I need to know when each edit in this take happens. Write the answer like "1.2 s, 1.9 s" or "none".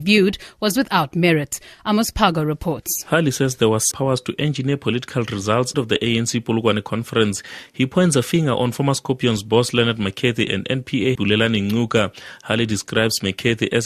3.9 s, 5.7 s, 11.2 s

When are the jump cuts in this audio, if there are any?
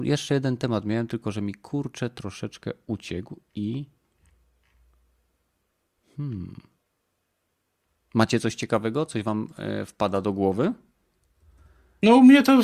none

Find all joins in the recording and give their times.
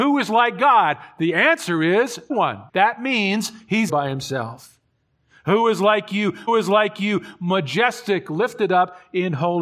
2.3 s, 2.7 s, 3.9 s, 6.5 s

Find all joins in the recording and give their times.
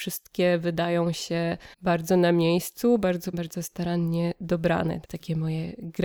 1.7 s, 3.3 s, 5.0 s

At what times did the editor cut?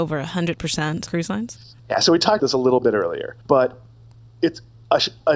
1.1 s, 1.8 s, 2.4 s, 3.4 s

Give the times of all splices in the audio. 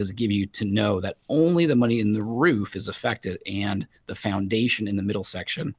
none

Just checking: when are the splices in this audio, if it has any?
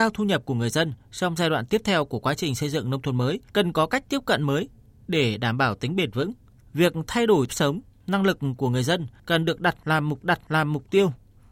3.5 s, 7.5 s, 10.2 s

